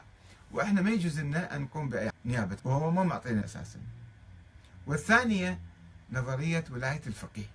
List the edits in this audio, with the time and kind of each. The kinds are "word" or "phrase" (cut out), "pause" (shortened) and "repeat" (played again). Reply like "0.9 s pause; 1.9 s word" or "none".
2.1 s word; 2.6 s word; 3.4 s word